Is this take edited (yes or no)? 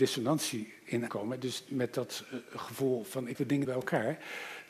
yes